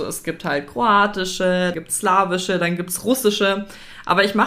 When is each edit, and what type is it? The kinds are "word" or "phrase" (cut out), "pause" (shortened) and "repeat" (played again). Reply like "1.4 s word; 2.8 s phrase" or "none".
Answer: 1.7 s word